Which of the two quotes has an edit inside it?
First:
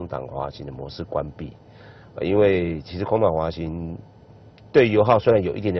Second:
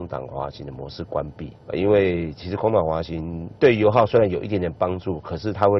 second; 2 cuts; at 1.6 s, 3.6 s

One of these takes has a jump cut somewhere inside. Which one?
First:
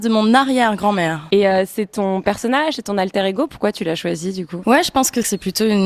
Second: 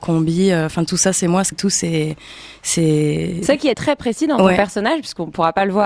second; 2 cuts; at 1.5 s, 3.7 s

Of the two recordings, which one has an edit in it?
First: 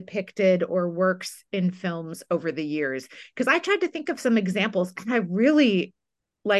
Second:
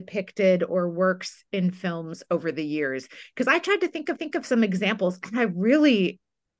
second; 1 cut; at 4.2 s

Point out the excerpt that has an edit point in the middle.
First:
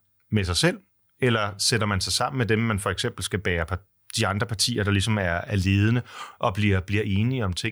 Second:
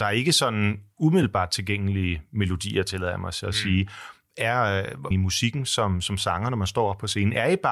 second; 1 cut; at 5.1 s

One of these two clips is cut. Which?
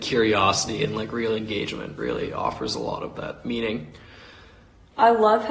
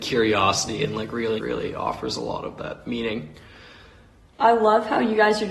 second; 1 cut; at 1.4 s

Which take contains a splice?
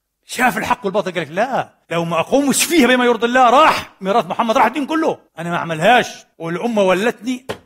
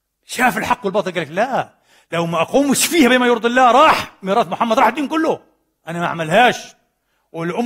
first; 3 cuts; at 1.8 s, 5.3 s, 6.3 s

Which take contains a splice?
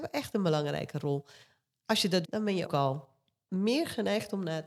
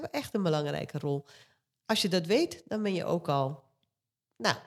first; 3 cuts; at 2.2 s, 2.7 s, 3.5 s

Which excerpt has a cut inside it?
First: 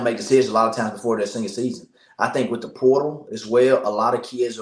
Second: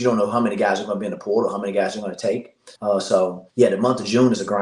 second; 2 cuts; at 2.8 s, 3.5 s

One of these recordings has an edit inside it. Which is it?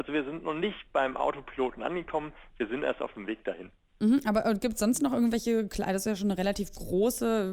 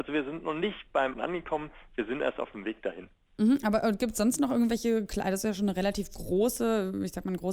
second; 1 cut; at 1.1 s

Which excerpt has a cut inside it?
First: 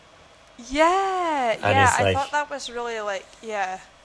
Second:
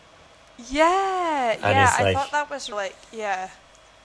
second; 1 cut; at 2.7 s

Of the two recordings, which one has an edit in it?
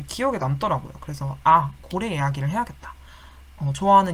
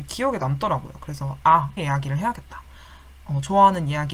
second; 1 cut; at 1.8 s

